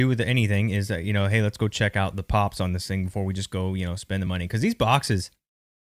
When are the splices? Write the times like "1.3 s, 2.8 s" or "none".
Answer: none